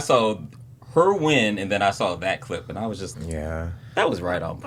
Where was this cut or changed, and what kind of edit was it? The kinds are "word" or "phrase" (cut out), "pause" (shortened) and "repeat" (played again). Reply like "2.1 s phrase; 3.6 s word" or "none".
3.1 s word